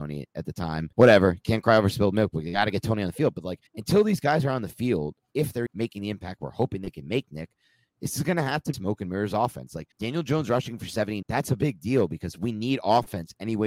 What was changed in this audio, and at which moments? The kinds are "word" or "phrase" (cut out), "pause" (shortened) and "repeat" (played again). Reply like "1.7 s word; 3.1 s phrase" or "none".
0.9 s pause; 3.7 s pause; 5.7 s word; 8.7 s phrase; 9.9 s pause; 11.2 s word

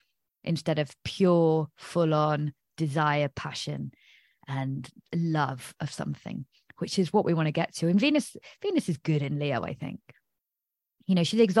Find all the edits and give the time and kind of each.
none

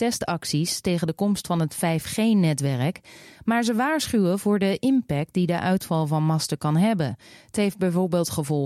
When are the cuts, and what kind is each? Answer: none

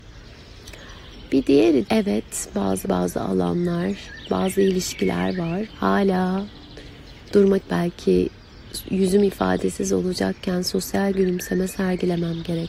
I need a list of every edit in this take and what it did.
1.9 s word; 2.8 s word; 5.7 s word; 7.6 s word

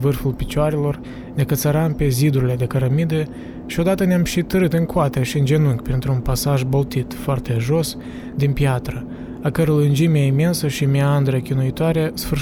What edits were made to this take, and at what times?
none

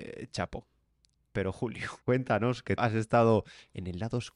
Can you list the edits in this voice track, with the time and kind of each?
2.0 s pause; 2.8 s word

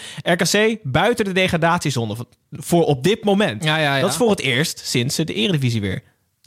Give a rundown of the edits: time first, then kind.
none

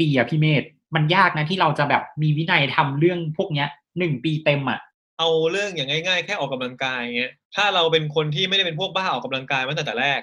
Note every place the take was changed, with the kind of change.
7.4 s pause

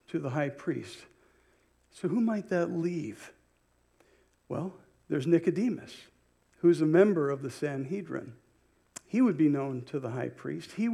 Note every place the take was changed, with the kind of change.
none

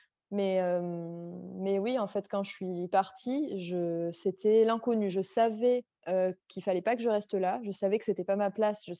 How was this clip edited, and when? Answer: 2.9 s phrase

